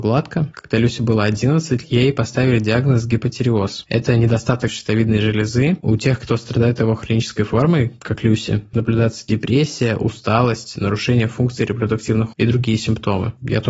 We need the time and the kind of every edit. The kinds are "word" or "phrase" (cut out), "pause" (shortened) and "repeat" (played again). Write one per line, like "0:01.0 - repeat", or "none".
0:01.8 - word
0:04.7 - word
0:08.7 - word
0:12.3 - word